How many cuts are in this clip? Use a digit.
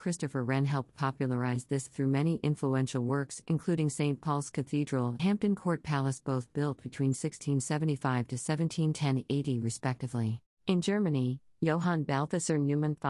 3